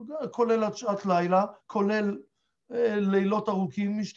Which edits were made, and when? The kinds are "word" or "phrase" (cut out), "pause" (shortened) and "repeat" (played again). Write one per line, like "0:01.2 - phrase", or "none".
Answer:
0:01.6 - pause